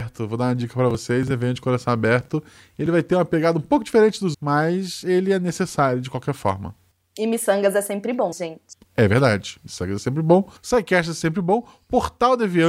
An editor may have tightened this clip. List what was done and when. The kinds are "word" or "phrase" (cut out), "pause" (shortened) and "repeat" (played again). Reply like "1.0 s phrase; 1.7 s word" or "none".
4.3 s word; 8.3 s word; 10.6 s pause